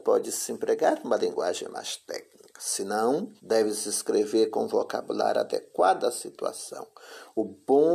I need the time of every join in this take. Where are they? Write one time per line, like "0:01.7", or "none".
0:03.4